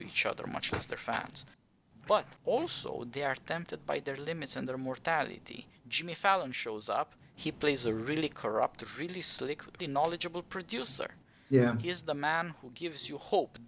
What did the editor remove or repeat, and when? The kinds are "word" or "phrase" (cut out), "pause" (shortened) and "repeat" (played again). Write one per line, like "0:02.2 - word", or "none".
0:09.8 - word